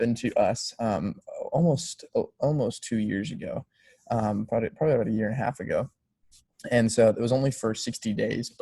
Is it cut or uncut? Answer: uncut